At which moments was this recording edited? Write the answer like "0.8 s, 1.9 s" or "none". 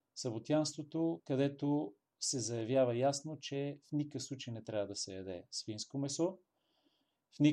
none